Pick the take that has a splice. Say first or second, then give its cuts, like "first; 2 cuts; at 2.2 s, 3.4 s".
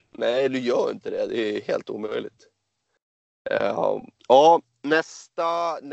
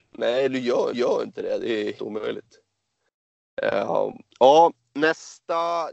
second; 2 cuts; at 0.9 s, 2.0 s